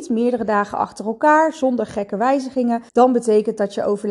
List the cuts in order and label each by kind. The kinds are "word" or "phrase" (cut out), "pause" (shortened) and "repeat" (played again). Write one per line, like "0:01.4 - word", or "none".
0:02.9 - pause